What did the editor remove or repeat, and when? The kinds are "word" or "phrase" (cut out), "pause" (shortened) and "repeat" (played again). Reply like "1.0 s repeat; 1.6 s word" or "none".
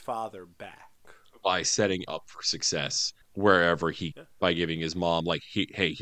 2.1 s word; 3.2 s pause; 4.1 s word